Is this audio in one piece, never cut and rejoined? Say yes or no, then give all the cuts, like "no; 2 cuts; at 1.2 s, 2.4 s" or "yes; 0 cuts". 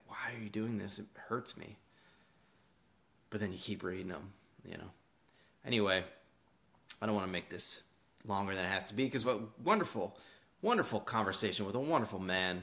no; 1 cut; at 9.2 s